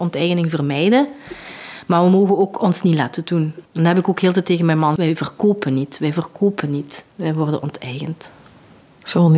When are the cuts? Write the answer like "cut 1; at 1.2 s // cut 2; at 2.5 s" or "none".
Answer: cut 1; at 3.7 s // cut 2; at 5.0 s // cut 3; at 7.1 s